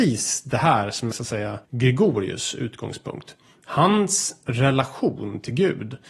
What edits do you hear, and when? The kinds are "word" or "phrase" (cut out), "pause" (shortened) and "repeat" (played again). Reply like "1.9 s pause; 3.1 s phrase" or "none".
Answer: 1.1 s word